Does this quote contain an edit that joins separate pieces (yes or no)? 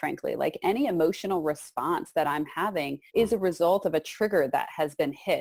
yes